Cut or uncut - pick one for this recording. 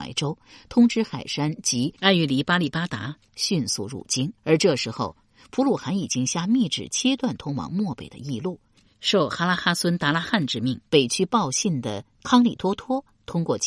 cut